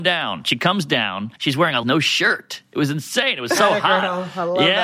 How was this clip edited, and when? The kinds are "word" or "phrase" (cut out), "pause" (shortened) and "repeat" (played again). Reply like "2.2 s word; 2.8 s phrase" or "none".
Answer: 1.4 s pause; 1.8 s phrase